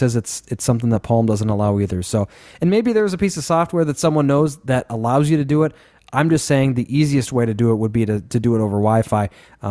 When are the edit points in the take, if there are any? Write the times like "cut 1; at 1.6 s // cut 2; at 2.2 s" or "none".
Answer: none